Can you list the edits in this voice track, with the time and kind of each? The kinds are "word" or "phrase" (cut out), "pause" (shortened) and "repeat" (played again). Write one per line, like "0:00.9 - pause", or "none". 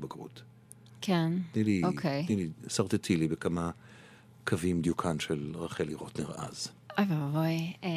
none

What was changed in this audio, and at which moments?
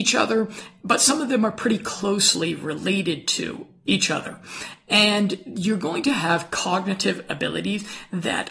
none

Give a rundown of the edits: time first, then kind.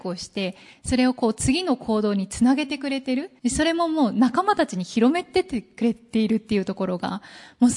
0:03.4 - pause

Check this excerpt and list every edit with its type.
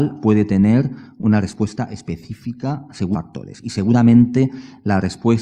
0:03.1 - word

